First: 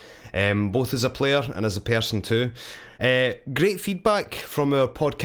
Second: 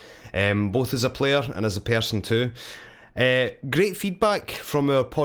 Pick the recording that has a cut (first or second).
first